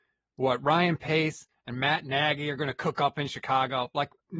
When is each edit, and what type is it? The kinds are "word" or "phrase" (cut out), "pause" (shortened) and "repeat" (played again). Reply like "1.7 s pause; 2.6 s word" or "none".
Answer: none